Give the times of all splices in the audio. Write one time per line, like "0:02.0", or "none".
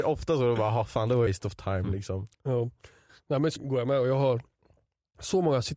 0:01.3
0:02.3
0:03.6